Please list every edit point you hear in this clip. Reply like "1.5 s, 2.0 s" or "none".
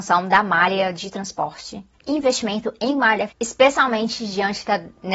3.3 s